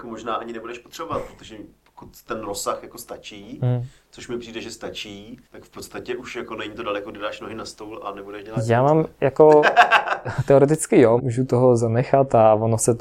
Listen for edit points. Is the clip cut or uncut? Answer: cut